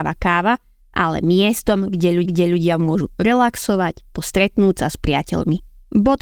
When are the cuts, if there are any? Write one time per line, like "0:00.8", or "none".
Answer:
0:02.2
0:04.1